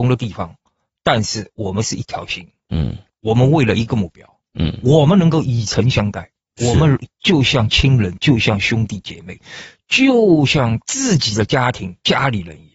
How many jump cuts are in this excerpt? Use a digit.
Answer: 0